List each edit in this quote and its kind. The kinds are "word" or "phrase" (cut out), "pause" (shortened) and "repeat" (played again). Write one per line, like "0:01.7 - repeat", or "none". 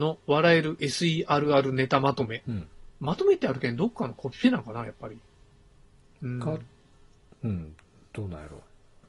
0:02.9 - pause

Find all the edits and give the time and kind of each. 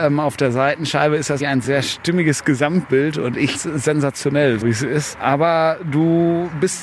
0:01.4 - word
0:03.5 - word
0:04.6 - word

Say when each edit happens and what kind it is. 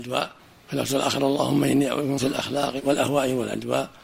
0:02.2 - word

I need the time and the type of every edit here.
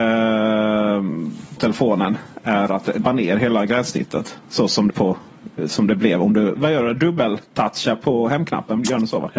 0:01.6 - word
0:02.7 - word
0:03.1 - phrase
0:04.9 - word
0:06.6 - word

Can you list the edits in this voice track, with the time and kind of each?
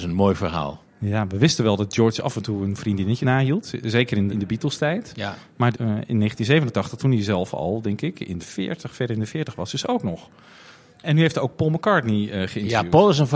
0:03.2 - word
0:04.3 - word
0:05.7 - word
0:08.4 - word

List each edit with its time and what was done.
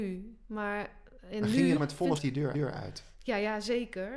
0:01.8 - phrase
0:02.2 - word
0:02.5 - repeat

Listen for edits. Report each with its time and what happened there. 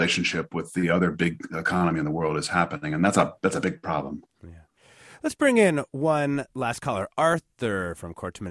none

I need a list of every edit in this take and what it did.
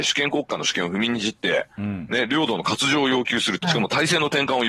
0:03.6 - phrase

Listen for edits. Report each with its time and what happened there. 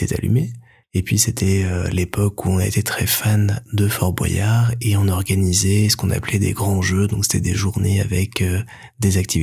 none

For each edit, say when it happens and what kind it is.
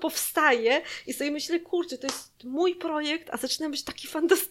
none

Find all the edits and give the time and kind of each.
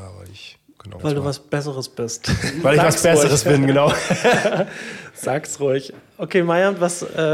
0:01.0 - phrase

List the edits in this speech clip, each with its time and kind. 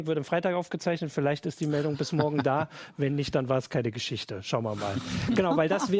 none

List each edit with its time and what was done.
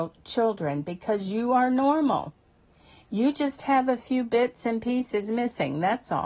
none

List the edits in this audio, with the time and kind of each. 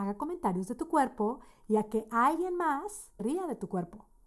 0:03.2 - word

